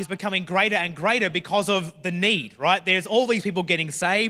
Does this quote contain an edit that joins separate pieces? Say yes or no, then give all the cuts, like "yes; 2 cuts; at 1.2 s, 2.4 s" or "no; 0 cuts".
no; 0 cuts